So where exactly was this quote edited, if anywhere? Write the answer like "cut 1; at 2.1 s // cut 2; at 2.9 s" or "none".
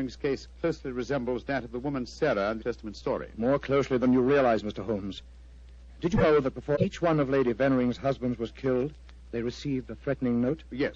cut 1; at 2.6 s